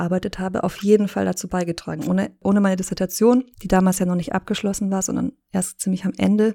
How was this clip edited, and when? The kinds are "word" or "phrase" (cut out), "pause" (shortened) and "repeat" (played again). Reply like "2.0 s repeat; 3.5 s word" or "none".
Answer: 3.5 s pause